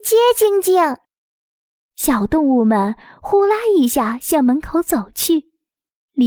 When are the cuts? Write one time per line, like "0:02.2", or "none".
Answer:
none